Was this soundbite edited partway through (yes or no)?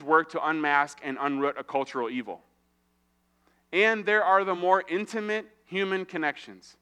no